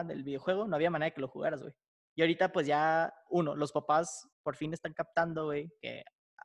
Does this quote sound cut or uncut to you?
cut